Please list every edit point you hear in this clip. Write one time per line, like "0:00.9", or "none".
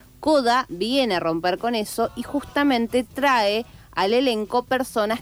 none